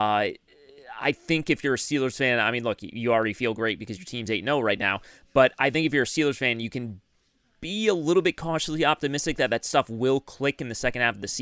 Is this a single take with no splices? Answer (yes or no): yes